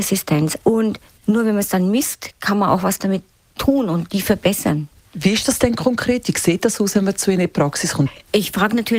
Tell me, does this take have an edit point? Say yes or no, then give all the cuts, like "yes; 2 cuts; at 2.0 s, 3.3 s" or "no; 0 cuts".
no; 0 cuts